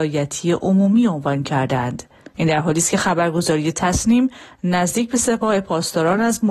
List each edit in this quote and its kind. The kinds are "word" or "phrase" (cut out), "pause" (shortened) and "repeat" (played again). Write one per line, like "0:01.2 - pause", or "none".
0:02.3 - pause